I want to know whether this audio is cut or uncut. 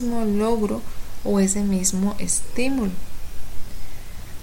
uncut